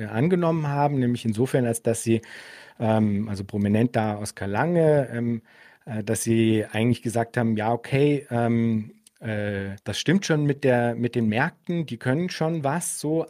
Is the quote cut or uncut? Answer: cut